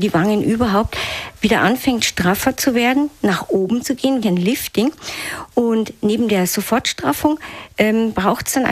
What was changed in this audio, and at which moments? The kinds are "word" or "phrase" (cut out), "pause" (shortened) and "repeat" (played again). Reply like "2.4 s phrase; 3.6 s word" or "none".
4.2 s word